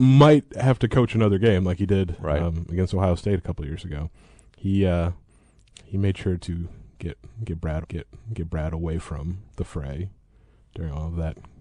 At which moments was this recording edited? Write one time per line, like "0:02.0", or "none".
0:07.8